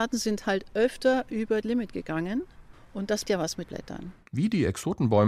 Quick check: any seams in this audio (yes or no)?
yes